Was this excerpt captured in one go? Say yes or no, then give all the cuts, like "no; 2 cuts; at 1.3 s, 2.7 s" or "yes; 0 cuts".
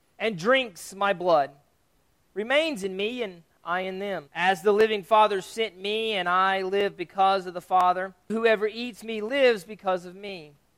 no; 2 cuts; at 4.3 s, 8.3 s